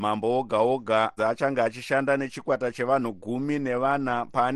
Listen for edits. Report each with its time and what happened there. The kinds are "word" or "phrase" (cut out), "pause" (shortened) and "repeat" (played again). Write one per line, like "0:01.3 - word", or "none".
0:01.2 - word